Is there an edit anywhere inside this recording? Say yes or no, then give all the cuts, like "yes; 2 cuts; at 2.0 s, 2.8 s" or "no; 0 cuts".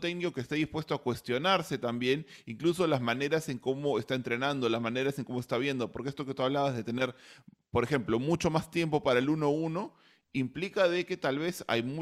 no; 0 cuts